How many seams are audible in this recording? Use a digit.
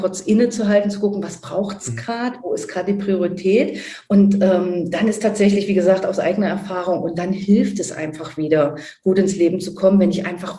0